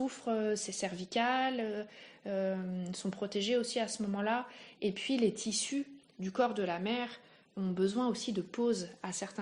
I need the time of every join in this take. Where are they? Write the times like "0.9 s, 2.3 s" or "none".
none